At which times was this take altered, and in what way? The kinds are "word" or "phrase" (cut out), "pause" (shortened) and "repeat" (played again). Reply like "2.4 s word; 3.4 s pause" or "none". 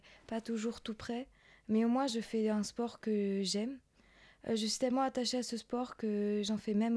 none